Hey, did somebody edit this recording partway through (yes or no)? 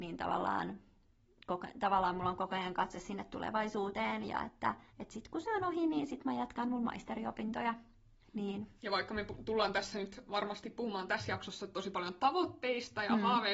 yes